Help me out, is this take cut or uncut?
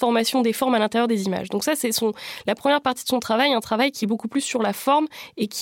uncut